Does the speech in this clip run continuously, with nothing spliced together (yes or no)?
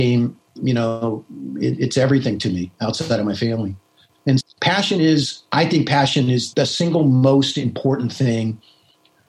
no